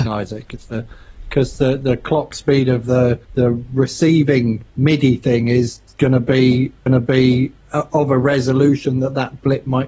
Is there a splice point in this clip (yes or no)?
yes